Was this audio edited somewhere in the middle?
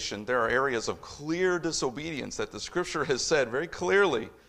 no; 0 cuts

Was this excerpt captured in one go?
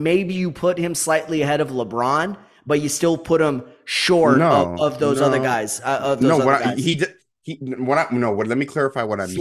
yes; 0 cuts

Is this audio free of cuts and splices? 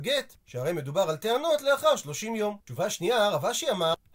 no; 1 cut; at 2.6 s

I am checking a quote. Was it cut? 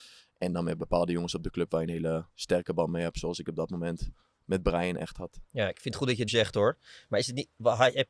yes; 2 cuts; at 2.3 s, 6.3 s

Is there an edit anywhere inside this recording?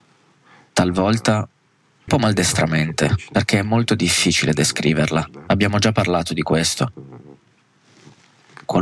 yes; 1 cut; at 2.1 s

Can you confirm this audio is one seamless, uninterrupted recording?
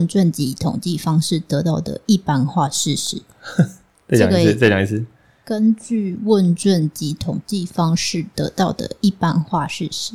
yes; 0 cuts

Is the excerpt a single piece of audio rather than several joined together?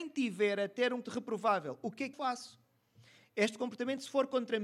no; 2 cuts; at 1.0 s, 2.1 s

